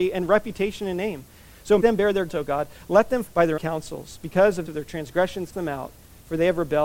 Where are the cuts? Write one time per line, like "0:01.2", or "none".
0:01.8
0:02.3
0:03.3
0:03.6
0:04.7
0:05.5